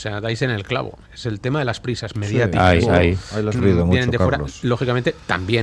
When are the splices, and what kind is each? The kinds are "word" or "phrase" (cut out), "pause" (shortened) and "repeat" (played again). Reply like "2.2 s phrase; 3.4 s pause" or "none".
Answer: 2.1 s phrase; 3.5 s word